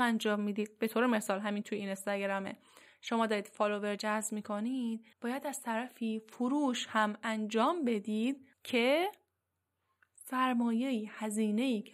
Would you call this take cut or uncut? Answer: cut